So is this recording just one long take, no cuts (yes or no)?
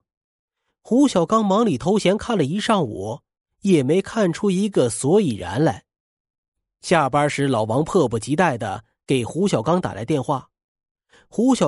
no